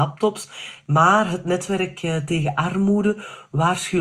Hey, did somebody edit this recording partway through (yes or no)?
no